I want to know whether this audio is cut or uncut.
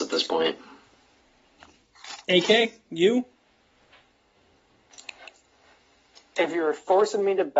uncut